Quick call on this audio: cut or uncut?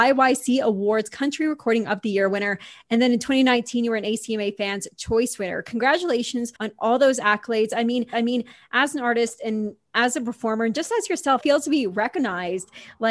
cut